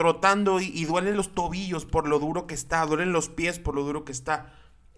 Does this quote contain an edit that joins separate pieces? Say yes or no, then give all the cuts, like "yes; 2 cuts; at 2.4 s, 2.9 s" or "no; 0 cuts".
no; 0 cuts